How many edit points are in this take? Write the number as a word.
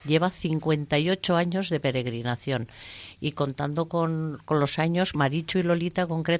zero